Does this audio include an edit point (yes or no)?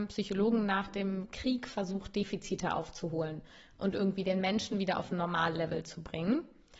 no